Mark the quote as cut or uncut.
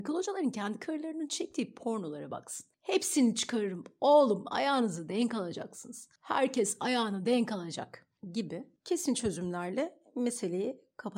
cut